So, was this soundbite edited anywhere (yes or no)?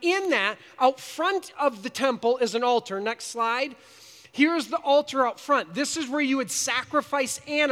no